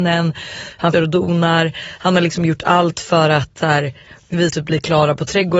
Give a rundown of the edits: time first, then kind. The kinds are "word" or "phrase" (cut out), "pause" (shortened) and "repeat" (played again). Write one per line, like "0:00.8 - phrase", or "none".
0:00.9 - word
0:04.5 - word

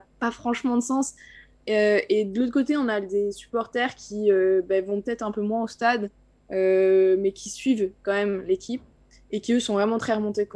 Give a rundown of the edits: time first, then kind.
none

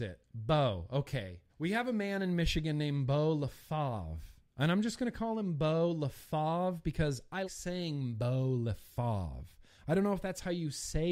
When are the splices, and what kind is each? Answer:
0:01.5 - pause
0:07.4 - word

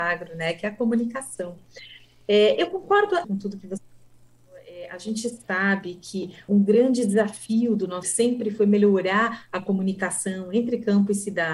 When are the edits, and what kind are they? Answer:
0:03.2 - word
0:06.5 - word
0:08.0 - word

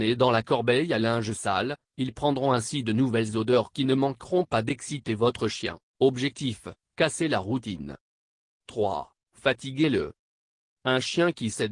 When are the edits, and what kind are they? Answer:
0:05.9 - pause
0:09.2 - pause

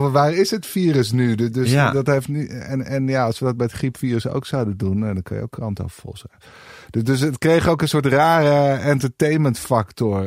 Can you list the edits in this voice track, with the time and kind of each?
none

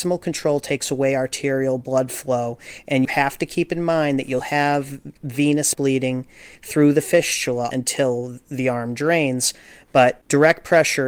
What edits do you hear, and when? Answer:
0:03.0 - word
0:04.4 - word
0:05.7 - word
0:07.7 - word

